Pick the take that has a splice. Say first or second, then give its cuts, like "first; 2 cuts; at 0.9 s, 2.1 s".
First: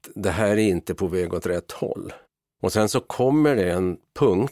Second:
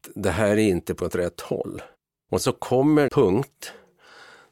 second; 3 cuts; at 1.0 s, 2.4 s, 3.1 s